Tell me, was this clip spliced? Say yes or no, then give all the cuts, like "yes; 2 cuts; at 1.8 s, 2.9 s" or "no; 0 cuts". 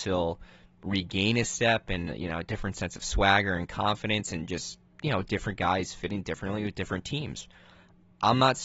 no; 0 cuts